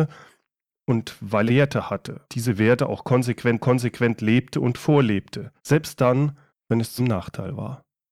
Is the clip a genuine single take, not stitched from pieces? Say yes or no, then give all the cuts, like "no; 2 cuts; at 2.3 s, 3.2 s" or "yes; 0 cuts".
no; 6 cuts; at 1.5 s, 2.3 s, 3.6 s, 5.6 s, 6.5 s, 7.0 s